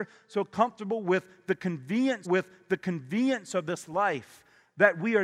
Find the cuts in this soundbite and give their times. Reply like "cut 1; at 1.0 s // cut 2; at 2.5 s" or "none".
cut 1; at 2.2 s